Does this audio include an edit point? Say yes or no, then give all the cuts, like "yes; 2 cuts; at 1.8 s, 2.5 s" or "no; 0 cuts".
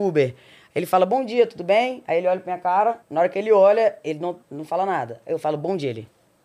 yes; 2 cuts; at 3.0 s, 4.4 s